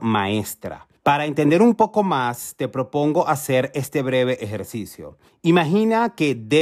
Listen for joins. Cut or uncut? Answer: cut